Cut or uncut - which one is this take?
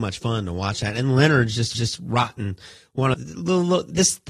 cut